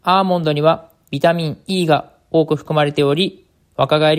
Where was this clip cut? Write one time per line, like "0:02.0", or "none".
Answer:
none

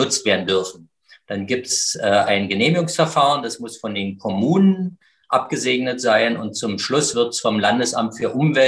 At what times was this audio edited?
none

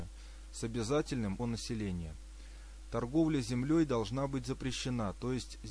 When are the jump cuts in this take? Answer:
0:01.4

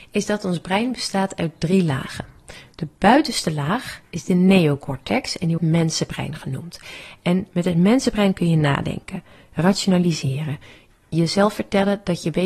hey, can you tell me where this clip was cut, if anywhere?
0:05.6

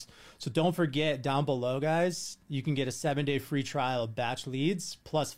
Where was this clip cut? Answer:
0:02.4

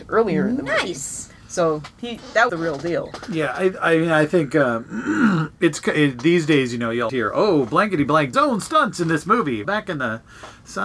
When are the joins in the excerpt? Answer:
0:02.5
0:07.1
0:08.3
0:09.6

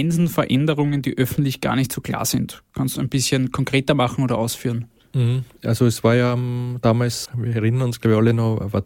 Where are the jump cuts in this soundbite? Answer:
0:03.0
0:07.3

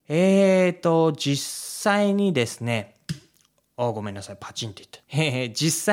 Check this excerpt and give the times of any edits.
0:05.0

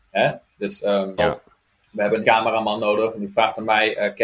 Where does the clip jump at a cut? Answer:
0:01.2
0:01.7
0:02.2

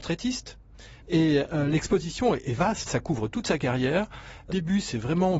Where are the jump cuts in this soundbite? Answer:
0:01.0
0:02.9
0:04.5

